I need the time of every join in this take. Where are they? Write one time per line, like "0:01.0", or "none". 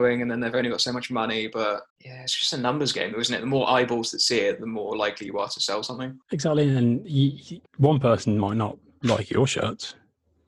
0:01.9
0:06.2
0:07.7